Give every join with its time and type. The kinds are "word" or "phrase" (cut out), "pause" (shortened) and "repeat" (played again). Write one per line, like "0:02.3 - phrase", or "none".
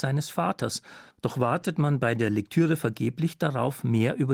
0:01.1 - pause